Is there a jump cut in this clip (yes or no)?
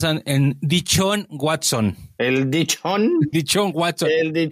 yes